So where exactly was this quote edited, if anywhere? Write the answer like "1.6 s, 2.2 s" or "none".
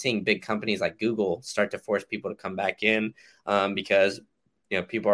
none